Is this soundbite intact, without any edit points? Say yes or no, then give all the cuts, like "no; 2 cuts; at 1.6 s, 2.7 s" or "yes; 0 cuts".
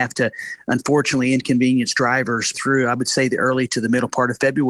no; 1 cut; at 2.5 s